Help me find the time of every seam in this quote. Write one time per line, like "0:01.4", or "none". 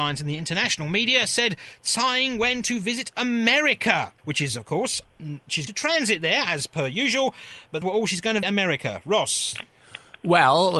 0:04.2
0:05.7
0:07.8
0:08.4